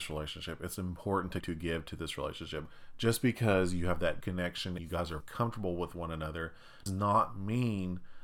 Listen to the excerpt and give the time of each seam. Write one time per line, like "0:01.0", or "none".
0:01.4
0:04.2
0:04.8
0:05.2
0:06.9